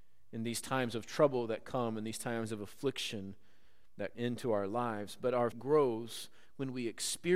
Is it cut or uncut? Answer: cut